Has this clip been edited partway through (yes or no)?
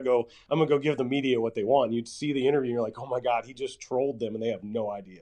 no